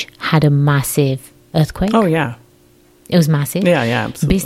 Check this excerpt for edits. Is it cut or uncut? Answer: uncut